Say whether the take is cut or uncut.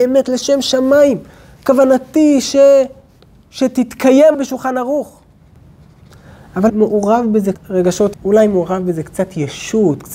cut